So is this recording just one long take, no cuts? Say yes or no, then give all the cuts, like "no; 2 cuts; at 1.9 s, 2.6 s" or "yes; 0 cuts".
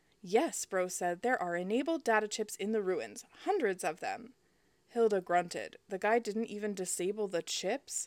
yes; 0 cuts